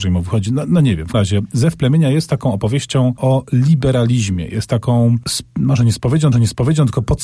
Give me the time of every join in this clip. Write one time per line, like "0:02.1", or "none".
0:01.1
0:03.2
0:06.3